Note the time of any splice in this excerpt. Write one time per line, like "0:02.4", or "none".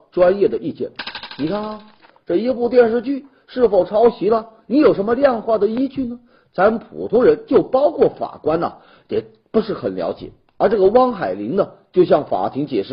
none